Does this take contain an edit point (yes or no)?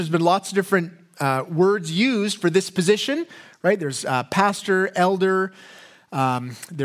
no